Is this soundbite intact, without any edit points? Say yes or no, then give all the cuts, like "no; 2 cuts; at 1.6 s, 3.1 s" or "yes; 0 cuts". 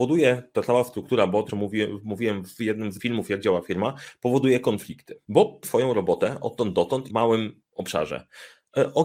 no; 4 cuts; at 1.5 s, 3.0 s, 5.6 s, 7.1 s